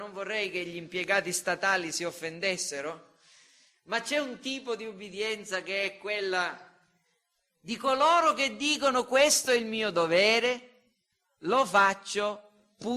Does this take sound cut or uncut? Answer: uncut